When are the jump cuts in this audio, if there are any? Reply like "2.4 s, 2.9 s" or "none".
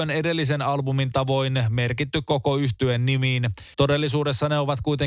3.7 s